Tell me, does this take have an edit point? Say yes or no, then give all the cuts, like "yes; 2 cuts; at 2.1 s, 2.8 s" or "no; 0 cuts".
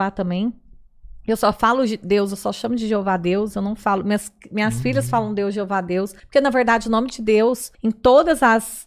yes; 2 cuts; at 6.2 s, 7.7 s